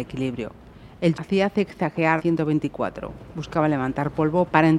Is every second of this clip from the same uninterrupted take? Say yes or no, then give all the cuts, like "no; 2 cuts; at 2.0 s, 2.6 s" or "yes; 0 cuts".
no; 2 cuts; at 1.1 s, 2.2 s